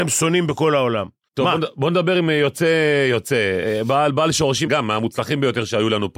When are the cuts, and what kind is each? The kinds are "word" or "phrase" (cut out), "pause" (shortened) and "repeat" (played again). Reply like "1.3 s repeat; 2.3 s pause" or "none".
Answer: 1.3 s pause; 4.7 s word